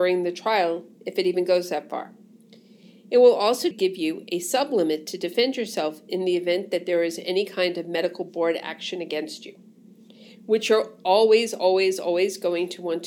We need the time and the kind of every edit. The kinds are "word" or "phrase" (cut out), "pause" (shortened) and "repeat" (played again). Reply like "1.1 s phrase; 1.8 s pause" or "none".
3.7 s word